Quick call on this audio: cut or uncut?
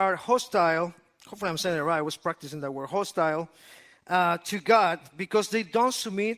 uncut